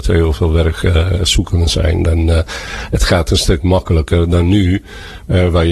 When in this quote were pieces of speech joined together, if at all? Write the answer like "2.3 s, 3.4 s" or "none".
none